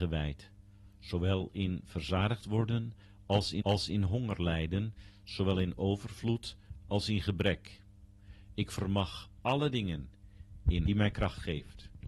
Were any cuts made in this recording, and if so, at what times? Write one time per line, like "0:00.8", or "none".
0:03.6
0:10.9